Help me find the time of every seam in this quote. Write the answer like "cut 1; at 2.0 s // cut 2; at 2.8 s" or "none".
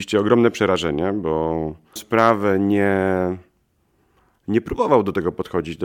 cut 1; at 2.0 s